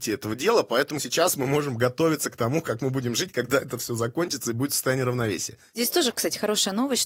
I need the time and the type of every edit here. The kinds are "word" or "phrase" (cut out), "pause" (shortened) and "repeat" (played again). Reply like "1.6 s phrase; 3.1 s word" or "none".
none